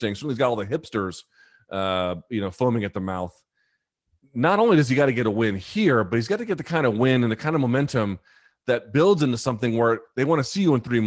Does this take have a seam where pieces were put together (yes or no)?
no